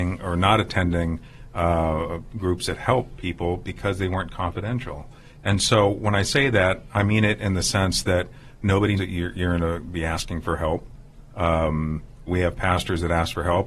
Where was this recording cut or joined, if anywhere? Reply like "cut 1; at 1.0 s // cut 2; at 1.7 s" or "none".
cut 1; at 9.0 s // cut 2; at 12.3 s